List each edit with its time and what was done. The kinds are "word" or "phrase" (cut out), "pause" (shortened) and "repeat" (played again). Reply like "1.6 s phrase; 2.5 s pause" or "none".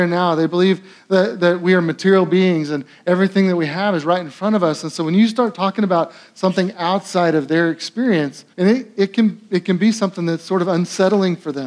8.5 s pause